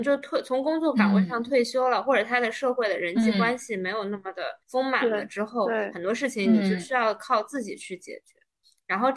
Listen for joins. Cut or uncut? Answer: cut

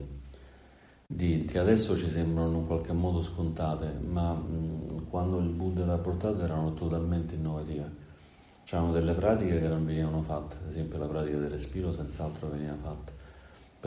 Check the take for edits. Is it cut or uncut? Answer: cut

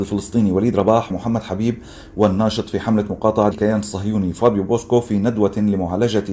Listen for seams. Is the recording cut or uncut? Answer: cut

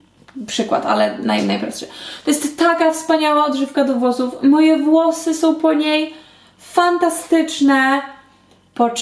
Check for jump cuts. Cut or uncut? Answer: uncut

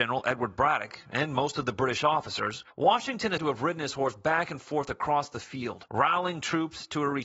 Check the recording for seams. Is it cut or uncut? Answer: cut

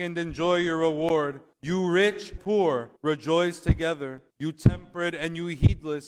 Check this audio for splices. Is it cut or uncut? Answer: cut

